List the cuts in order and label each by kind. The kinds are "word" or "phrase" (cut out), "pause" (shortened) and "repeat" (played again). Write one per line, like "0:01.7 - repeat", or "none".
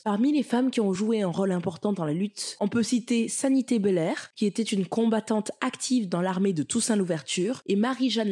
none